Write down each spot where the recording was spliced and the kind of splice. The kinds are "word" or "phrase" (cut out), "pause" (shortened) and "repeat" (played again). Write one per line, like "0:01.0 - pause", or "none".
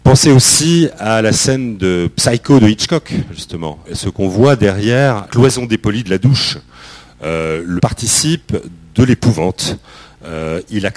0:03.8 - word
0:05.3 - word
0:07.8 - word

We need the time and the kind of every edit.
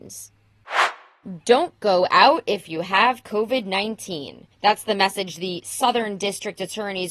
0:04.5 - pause

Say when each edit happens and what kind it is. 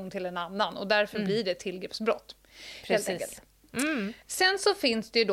0:04.2 - pause

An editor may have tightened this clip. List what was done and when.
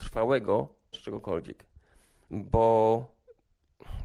0:00.9 - word

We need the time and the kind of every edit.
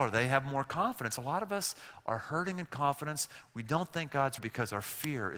0:04.4 - word

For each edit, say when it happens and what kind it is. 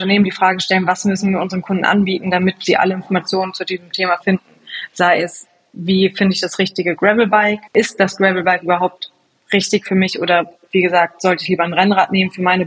0:07.7 - pause

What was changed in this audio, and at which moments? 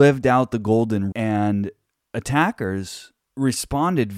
0:01.1 - word
0:02.1 - word

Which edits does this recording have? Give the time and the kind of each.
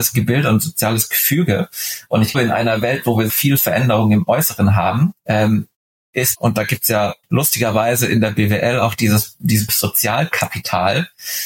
0:02.3 - word
0:03.3 - word
0:05.2 - pause
0:06.3 - word
0:07.2 - pause
0:09.7 - word

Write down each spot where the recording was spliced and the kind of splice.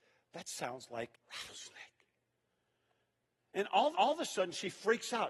0:01.1 - word
0:03.9 - repeat

